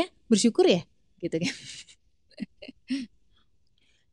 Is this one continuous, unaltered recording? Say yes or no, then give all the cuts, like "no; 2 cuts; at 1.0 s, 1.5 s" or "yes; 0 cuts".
yes; 0 cuts